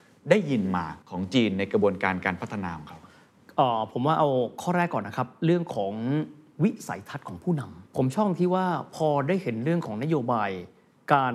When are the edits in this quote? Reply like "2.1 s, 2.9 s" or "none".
1.0 s, 7.9 s